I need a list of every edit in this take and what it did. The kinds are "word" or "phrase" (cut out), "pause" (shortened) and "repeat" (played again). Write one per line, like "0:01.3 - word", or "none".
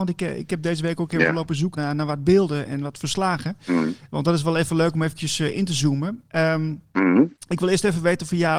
0:01.7 - word
0:02.7 - word

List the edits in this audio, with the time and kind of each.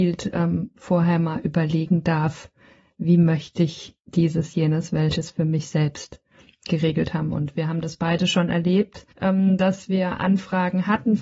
0:09.1 - pause

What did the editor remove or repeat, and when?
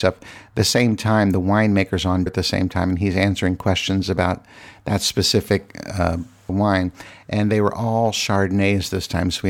0:02.3 - word
0:06.5 - word

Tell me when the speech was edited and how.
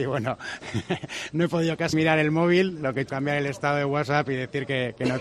0:01.9 - word
0:03.1 - phrase

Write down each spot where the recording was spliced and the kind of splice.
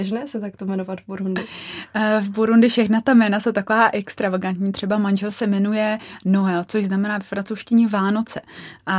none

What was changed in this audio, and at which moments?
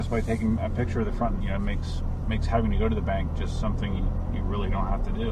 0:01.4 - word

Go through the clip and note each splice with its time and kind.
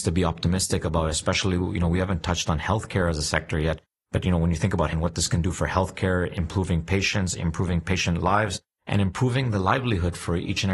0:04.9 - word

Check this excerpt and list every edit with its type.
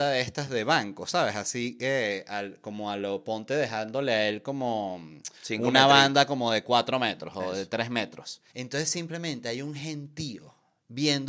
0:05.4 - pause
0:08.5 - pause

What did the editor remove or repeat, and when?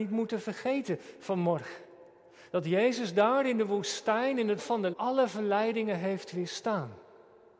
0:04.6 - word
0:04.9 - word

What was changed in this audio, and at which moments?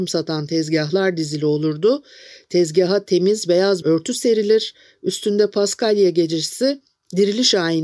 0:03.8 - word

